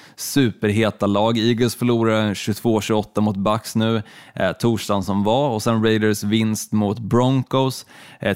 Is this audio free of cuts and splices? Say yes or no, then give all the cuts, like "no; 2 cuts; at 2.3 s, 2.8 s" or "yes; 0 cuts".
yes; 0 cuts